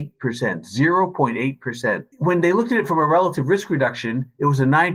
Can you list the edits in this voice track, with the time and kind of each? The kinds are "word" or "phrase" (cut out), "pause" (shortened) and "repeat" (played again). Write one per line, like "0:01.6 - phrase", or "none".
0:02.1 - pause